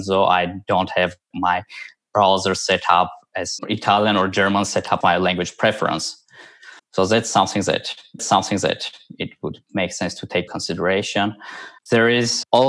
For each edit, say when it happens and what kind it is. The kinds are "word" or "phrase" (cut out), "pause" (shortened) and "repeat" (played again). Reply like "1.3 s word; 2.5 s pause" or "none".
1.3 s word; 3.6 s word; 5.0 s word; 6.8 s pause; 8.2 s repeat; 10.5 s word; 11.8 s pause